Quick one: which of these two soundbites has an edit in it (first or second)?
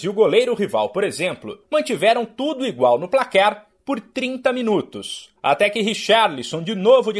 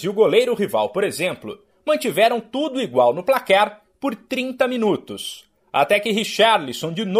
first